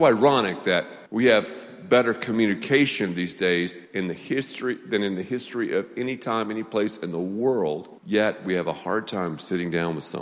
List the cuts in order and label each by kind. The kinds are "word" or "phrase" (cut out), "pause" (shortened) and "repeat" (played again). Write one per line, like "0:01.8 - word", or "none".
0:01.1 - pause
0:03.8 - pause
0:08.0 - pause